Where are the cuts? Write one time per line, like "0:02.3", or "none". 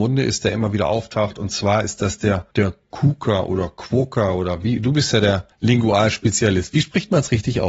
0:02.5
0:05.5

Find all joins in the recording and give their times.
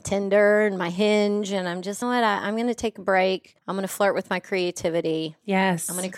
0:02.0
0:03.6

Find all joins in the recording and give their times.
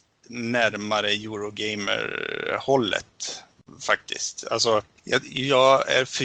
0:05.0

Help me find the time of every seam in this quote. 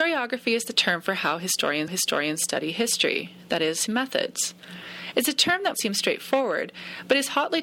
0:01.9
0:03.9
0:05.7

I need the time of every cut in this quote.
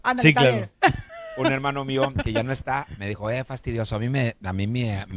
none

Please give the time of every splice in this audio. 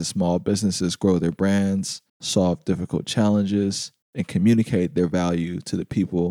0:02.1
0:04.0

